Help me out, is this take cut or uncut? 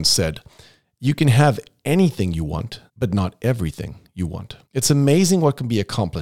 cut